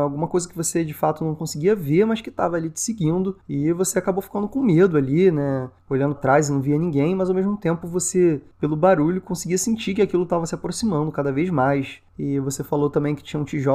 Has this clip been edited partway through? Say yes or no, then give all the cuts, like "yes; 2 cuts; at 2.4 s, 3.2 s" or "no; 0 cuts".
yes; 1 cut; at 6.2 s